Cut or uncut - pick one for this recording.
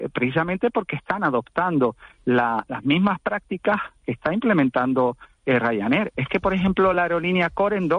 uncut